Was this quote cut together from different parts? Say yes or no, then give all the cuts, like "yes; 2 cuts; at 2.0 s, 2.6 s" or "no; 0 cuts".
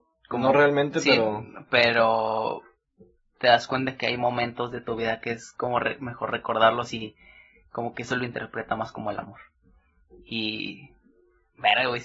no; 0 cuts